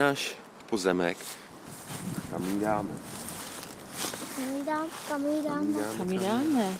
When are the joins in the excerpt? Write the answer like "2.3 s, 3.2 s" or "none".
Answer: none